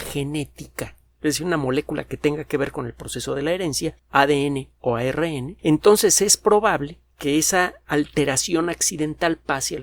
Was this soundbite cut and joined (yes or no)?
yes